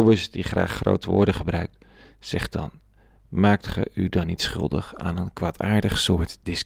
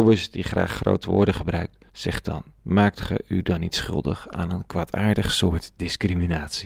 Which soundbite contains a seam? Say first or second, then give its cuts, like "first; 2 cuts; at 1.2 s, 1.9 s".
second; 2 cuts; at 1.9 s, 2.5 s